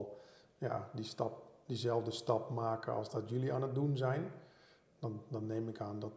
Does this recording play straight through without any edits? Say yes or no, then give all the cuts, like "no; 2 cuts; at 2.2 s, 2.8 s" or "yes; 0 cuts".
yes; 0 cuts